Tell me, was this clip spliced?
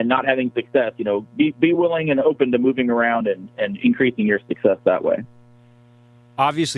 no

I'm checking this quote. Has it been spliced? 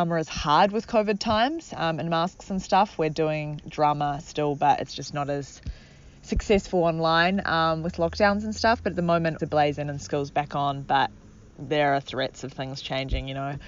yes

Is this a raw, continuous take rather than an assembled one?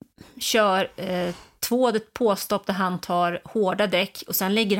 yes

